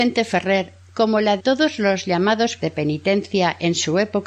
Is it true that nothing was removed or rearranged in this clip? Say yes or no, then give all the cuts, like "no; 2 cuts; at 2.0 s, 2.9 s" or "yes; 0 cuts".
no; 2 cuts; at 1.4 s, 2.6 s